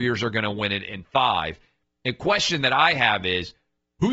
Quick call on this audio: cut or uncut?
uncut